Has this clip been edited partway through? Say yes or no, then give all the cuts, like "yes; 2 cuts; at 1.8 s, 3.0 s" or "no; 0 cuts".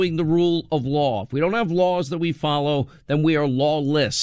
no; 0 cuts